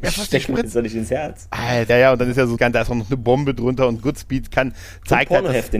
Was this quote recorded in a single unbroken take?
no; 2 cuts; at 1.9 s, 2.6 s

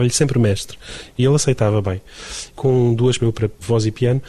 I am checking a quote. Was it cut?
yes; 1 cut; at 3.2 s

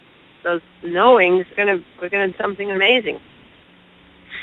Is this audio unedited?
no; 2 cuts; at 1.5 s, 2.3 s

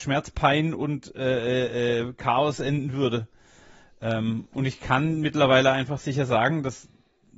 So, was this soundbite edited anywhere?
no; 0 cuts

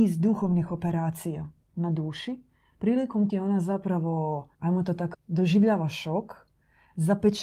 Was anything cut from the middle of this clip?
yes; 3 cuts; at 3.3 s, 4.5 s, 5.1 s

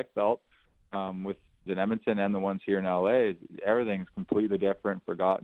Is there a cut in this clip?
yes; 1 cut; at 1.7 s

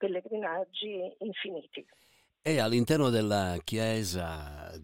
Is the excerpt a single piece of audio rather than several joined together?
yes; 0 cuts

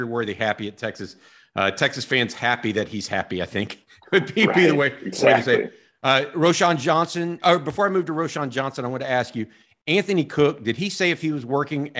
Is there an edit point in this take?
no; 0 cuts

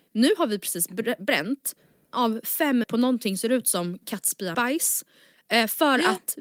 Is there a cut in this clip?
yes; 4 cuts; at 2.1 s, 2.8 s, 3.4 s, 4.5 s

